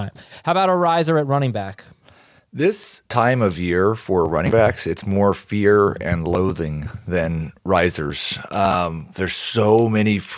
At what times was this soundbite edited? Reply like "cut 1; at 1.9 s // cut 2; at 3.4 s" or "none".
cut 1; at 3.1 s